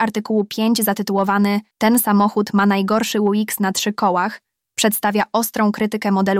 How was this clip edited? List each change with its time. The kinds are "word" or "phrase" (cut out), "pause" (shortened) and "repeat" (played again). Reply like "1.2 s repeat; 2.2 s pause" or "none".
1.7 s pause